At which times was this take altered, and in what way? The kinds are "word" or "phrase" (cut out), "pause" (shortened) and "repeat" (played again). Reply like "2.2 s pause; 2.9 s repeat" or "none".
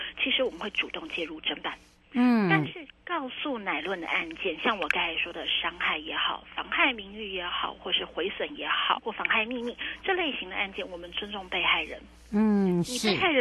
9.0 s word